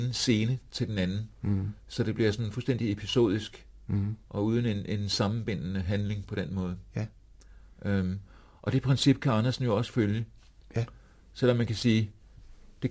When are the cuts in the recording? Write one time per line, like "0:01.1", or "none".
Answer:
none